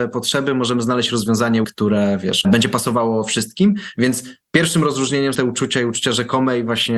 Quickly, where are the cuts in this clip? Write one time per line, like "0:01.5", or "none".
0:01.6
0:02.4
0:04.4
0:05.3